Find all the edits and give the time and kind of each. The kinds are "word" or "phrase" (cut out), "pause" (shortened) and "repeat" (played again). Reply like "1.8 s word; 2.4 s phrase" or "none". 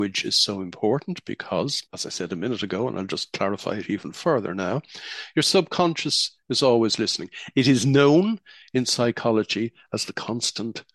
1.9 s pause